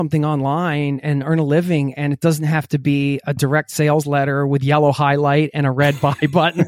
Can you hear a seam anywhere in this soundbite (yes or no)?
no